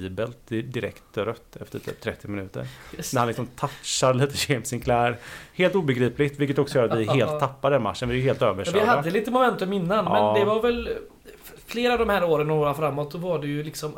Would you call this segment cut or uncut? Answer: uncut